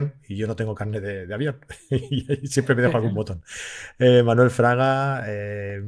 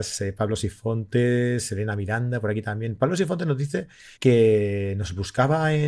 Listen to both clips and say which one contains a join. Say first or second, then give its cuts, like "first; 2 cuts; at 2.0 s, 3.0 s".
second; 1 cut; at 4.2 s